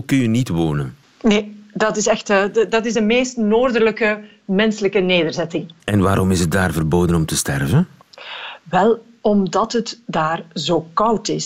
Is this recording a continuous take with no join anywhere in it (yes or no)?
yes